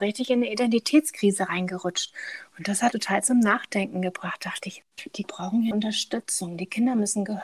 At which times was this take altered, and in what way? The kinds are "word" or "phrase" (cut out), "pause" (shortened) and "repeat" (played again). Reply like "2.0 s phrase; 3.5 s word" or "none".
2.9 s word; 5.2 s word; 5.7 s word